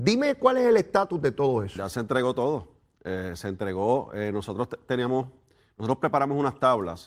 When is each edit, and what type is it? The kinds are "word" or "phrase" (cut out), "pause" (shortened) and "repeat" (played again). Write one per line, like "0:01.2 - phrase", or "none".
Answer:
none